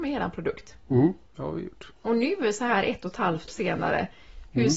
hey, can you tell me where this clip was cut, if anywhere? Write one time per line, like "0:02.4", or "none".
0:01.3
0:02.0
0:03.5